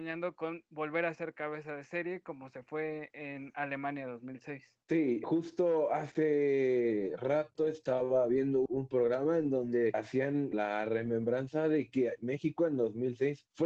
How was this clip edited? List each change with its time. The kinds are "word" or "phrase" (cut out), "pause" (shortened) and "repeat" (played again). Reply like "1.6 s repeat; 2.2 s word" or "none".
none